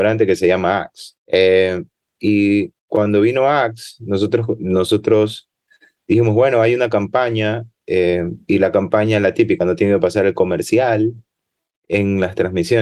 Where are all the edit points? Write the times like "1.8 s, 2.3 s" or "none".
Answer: 1.2 s, 2.8 s